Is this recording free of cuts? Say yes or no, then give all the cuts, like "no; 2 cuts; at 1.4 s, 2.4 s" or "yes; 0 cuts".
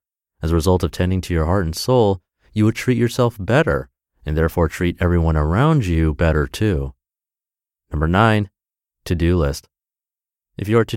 yes; 0 cuts